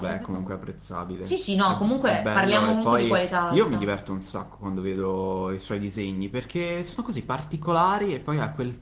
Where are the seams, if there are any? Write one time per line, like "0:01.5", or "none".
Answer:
none